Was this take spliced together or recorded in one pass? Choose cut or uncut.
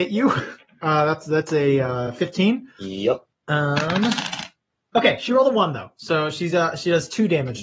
uncut